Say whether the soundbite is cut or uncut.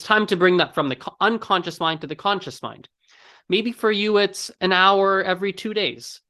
uncut